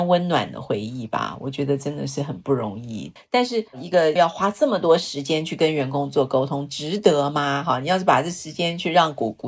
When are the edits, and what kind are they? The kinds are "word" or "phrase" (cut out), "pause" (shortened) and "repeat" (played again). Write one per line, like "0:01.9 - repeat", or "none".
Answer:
0:03.2 - pause
0:03.7 - pause
0:04.2 - word

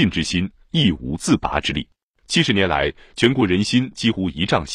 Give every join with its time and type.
0:02.0 - pause

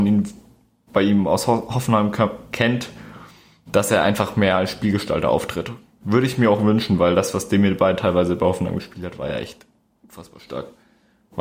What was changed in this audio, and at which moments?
none

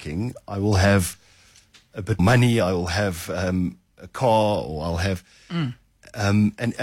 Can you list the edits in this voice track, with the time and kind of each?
0:02.2 - word

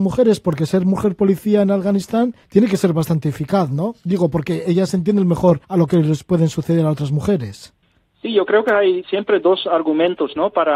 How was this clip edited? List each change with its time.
0:02.4 - pause
0:05.6 - pause
0:07.8 - pause

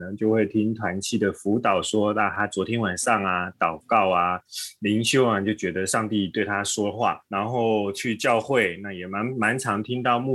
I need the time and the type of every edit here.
0:07.3 - pause

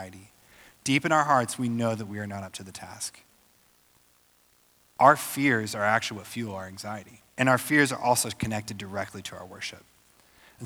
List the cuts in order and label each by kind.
0:07.3 - pause

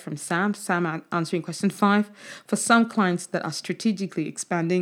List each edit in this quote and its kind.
none

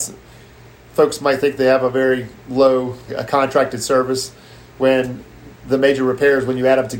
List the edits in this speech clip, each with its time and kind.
0:03.1 - word

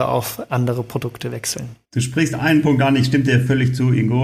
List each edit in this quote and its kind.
0:01.8 - pause

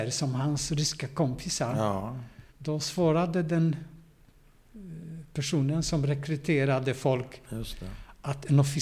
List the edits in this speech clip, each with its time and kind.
0:02.5 - pause

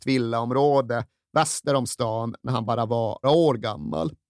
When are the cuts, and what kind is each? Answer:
0:03.2 - word

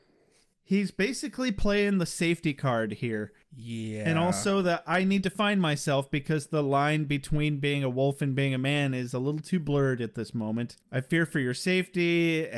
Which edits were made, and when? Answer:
0:10.8 - pause

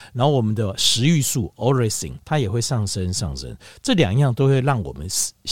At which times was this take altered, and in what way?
0:02.2 - pause

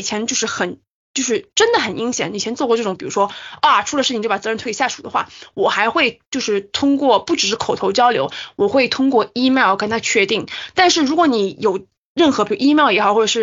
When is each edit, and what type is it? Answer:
none

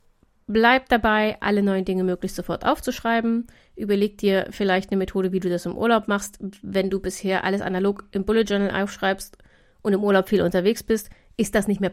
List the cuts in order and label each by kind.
none

